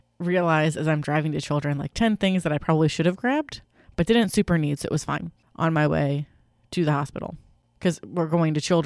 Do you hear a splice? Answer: no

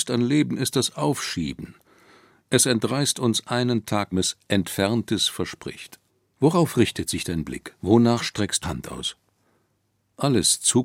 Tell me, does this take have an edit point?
yes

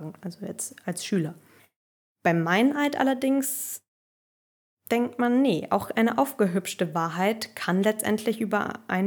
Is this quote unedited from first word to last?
yes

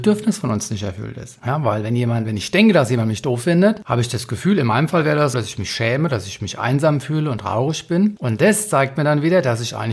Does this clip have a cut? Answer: yes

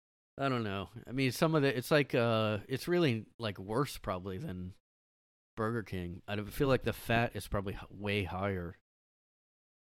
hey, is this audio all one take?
yes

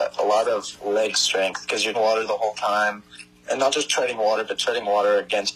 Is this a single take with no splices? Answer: no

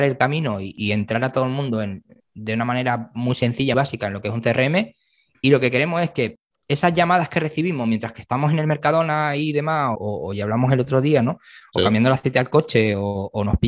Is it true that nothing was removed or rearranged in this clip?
no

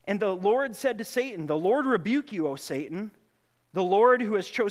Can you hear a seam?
no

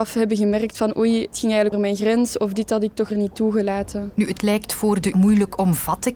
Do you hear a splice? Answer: yes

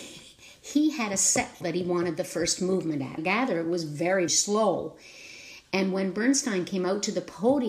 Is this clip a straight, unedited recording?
no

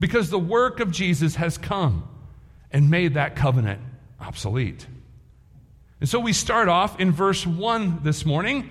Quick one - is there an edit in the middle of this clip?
no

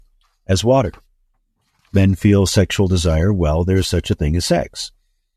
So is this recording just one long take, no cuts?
yes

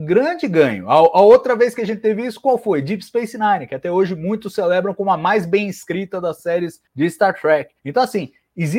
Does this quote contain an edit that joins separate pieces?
yes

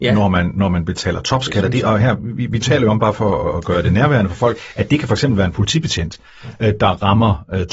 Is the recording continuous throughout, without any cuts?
yes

